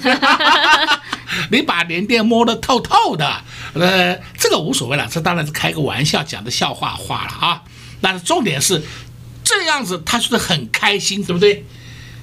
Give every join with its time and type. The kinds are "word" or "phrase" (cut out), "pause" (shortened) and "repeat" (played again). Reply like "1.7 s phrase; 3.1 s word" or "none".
11.3 s phrase